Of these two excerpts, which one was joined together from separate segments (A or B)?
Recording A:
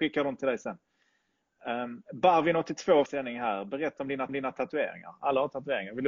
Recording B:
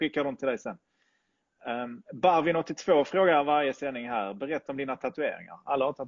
A